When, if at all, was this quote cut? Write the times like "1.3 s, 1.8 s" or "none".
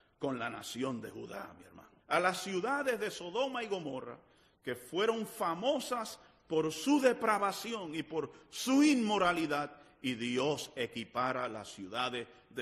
2.0 s